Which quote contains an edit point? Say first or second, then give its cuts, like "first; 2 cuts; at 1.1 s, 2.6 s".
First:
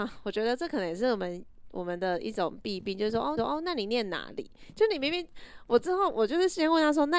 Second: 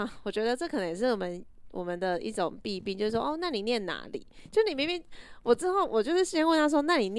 first; 1 cut; at 3.4 s